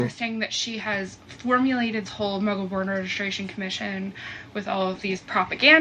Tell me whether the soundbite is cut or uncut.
cut